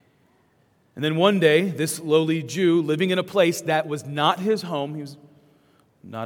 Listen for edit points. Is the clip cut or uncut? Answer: uncut